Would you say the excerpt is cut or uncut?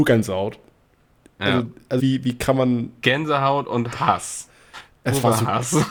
cut